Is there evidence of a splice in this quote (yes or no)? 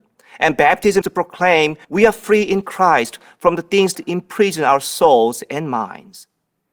yes